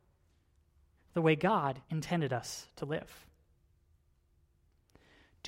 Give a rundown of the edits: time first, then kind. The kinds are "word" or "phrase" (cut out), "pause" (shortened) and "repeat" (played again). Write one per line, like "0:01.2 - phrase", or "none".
0:01.8 - pause